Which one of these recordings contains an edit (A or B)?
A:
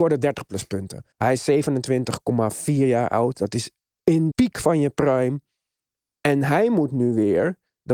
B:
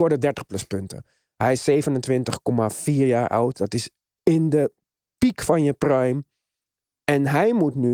A